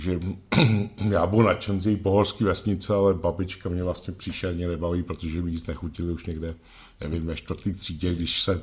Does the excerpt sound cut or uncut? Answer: uncut